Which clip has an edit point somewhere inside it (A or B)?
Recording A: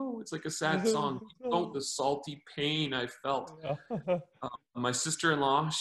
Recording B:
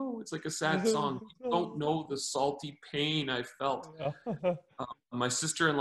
A